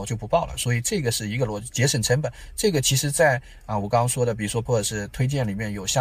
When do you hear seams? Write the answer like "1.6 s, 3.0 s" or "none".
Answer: 4.7 s